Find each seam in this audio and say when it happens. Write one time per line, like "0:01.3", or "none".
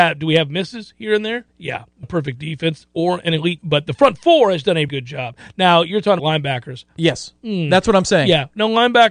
0:01.5
0:02.0
0:03.6
0:04.9
0:06.2